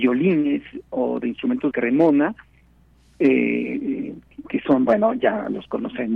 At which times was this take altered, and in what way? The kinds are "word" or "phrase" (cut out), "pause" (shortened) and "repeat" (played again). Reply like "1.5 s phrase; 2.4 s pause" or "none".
1.7 s phrase